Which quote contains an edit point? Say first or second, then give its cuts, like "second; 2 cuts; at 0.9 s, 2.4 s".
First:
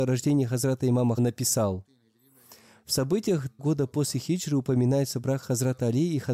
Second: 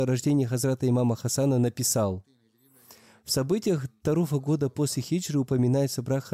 first; 2 cuts; at 1.2 s, 3.6 s